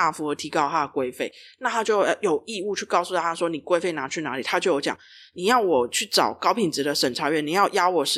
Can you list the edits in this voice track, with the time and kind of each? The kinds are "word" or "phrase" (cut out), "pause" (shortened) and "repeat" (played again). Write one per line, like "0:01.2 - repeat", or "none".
none